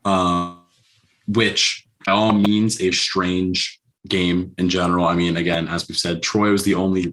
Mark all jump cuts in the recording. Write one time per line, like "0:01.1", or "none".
0:02.1
0:02.9

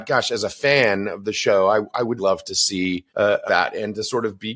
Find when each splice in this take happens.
0:02.2
0:03.1
0:03.5

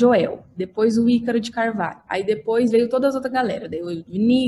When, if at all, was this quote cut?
none

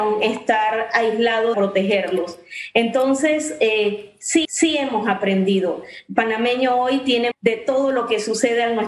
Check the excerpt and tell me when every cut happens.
0:01.5
0:04.4
0:07.3

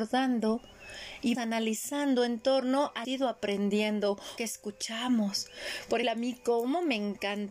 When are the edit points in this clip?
0:01.3
0:03.0
0:04.4
0:06.0

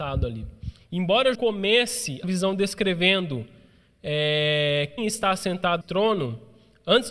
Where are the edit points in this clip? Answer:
0:01.3
0:02.2
0:05.0
0:05.8

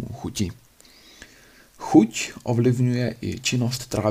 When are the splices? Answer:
0:01.6

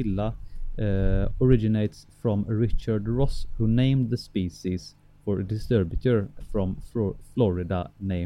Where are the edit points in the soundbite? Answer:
0:01.3
0:06.4

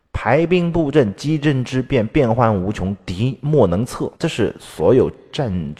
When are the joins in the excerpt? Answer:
0:04.2

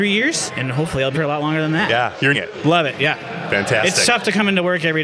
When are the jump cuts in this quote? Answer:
0:01.1
0:02.3

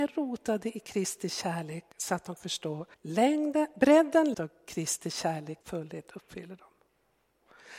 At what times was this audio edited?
0:02.4
0:02.9
0:04.3
0:05.6

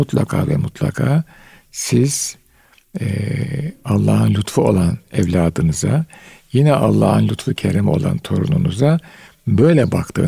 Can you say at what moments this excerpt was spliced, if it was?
none

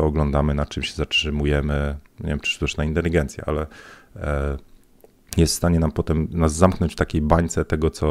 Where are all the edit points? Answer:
none

